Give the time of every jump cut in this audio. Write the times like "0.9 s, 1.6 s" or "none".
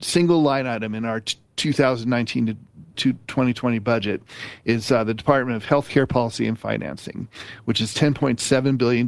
2.9 s